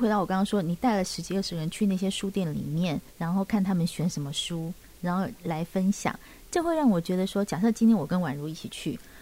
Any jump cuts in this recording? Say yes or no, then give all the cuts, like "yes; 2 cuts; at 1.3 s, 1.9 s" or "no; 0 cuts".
yes; 1 cut; at 3.1 s